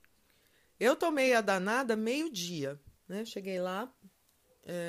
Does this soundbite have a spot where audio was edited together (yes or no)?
no